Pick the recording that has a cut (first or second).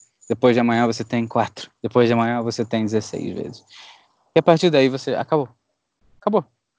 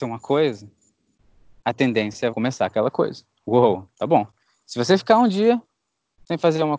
second